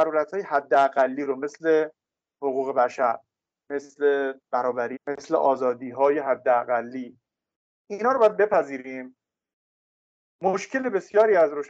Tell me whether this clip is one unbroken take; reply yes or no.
no